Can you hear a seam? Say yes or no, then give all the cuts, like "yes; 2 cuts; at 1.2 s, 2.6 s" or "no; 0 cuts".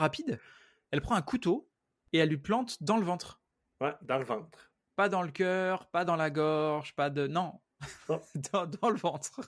no; 0 cuts